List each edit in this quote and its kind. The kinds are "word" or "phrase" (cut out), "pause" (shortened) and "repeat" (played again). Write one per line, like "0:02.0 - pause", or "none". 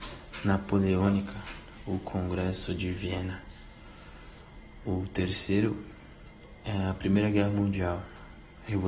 none